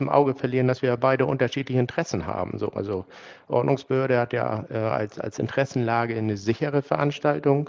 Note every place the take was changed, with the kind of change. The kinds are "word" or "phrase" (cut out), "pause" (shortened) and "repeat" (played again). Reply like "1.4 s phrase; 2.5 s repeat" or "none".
none